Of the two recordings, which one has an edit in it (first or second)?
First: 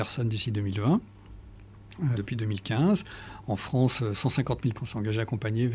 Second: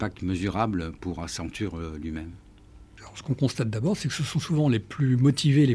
first